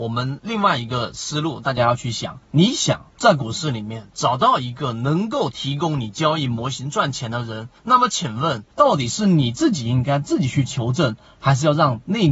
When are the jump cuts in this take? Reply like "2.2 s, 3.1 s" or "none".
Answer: 2.4 s, 3.1 s, 7.8 s, 8.7 s